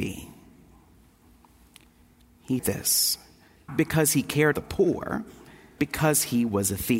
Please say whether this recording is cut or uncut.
cut